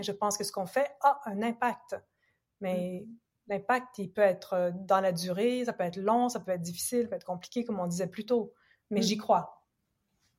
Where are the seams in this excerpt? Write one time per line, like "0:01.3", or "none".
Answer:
none